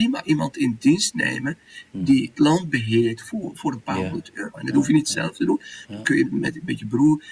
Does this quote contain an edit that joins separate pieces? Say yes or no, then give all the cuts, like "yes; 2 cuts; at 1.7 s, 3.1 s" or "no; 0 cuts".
yes; 2 cuts; at 2.3 s, 6.2 s